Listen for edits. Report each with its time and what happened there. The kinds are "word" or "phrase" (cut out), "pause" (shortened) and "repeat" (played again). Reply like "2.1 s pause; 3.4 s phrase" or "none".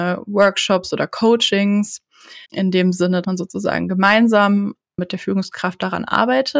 2.4 s pause; 3.2 s word